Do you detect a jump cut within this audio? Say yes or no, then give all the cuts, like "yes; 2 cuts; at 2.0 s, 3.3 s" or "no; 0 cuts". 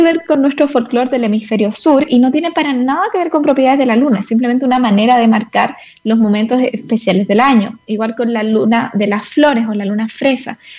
no; 0 cuts